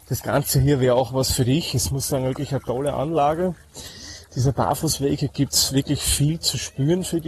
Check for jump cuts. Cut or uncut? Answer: uncut